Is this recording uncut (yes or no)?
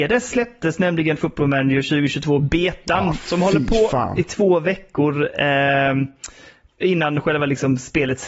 yes